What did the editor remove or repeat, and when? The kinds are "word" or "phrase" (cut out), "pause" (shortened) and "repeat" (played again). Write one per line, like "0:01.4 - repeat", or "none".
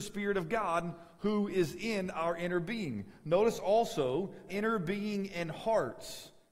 0:04.5 - word